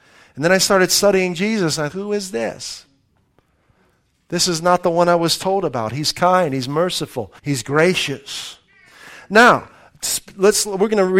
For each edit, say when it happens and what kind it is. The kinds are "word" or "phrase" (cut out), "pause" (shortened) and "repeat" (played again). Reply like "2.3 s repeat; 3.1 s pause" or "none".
1.9 s word; 7.4 s pause